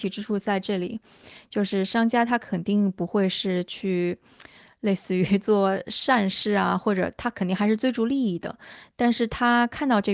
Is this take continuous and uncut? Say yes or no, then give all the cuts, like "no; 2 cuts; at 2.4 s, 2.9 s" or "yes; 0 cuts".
yes; 0 cuts